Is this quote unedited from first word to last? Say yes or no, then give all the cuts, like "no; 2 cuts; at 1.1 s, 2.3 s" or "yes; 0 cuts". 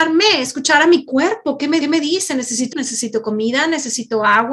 no; 2 cuts; at 1.8 s, 2.7 s